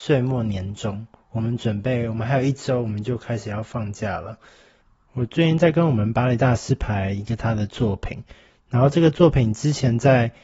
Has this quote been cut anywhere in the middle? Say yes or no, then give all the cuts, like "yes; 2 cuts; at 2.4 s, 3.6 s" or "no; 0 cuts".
no; 0 cuts